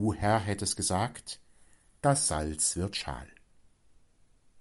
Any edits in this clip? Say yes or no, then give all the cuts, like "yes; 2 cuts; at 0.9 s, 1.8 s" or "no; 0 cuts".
no; 0 cuts